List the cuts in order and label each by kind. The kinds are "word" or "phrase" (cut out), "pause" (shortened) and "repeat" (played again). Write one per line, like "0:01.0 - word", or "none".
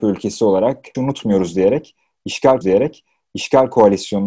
0:00.9 - word
0:02.6 - repeat